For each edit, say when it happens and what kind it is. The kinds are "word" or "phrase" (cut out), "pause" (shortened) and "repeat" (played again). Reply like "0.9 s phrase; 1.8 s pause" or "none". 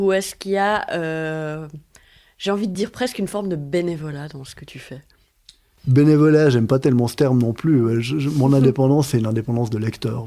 none